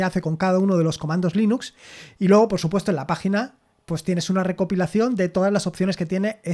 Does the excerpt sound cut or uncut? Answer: uncut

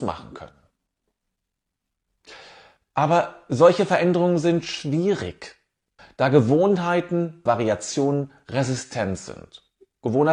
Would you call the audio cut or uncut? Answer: cut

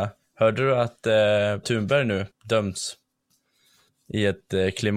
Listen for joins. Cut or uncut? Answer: cut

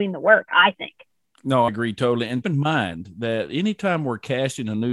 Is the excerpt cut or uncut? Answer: cut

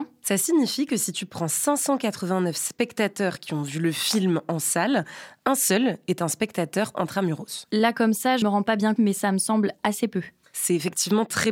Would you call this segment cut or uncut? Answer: cut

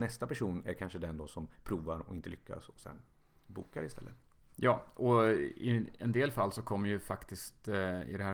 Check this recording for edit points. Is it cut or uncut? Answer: uncut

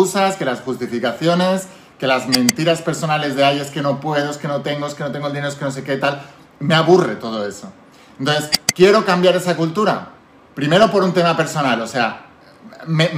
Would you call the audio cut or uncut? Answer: cut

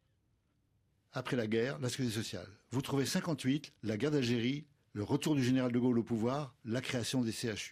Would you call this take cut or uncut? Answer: uncut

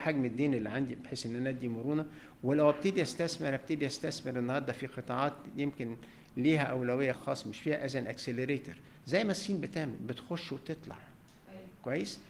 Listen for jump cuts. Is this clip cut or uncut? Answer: cut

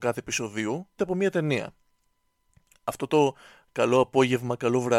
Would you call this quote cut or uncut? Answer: cut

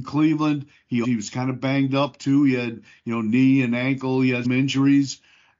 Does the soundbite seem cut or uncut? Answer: cut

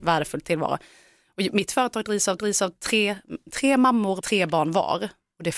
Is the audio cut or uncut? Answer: cut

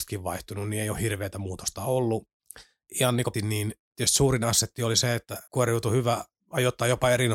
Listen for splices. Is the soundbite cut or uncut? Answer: cut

